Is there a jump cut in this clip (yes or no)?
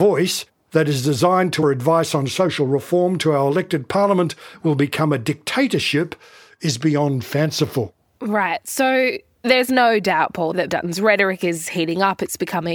yes